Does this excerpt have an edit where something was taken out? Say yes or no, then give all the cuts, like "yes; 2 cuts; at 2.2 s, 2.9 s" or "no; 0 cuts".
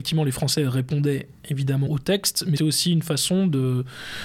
yes; 2 cuts; at 1.9 s, 2.6 s